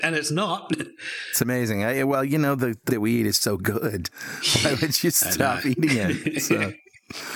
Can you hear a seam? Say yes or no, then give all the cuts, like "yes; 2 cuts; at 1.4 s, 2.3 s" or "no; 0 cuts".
yes; 2 cuts; at 2.9 s, 3.4 s